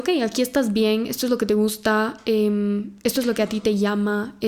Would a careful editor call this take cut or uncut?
uncut